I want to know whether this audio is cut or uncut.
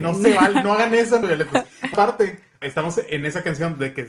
cut